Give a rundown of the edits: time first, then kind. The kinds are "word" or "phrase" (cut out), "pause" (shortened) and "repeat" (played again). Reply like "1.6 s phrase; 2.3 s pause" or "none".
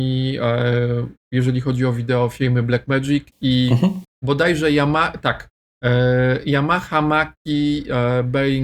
none